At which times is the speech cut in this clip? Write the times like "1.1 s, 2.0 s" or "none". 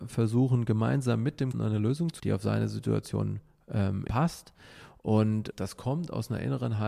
1.5 s, 2.2 s, 4.1 s, 5.5 s